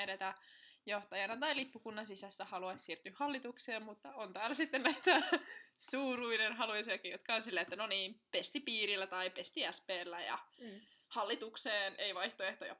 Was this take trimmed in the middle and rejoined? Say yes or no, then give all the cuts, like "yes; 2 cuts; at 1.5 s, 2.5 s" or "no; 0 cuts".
no; 0 cuts